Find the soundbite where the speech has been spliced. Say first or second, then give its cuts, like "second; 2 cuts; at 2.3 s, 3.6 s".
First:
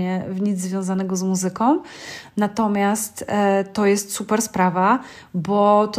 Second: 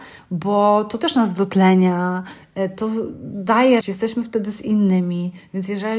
second; 1 cut; at 3.8 s